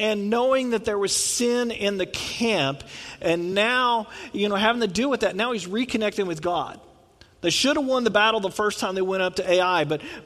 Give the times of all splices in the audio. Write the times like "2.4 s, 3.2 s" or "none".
none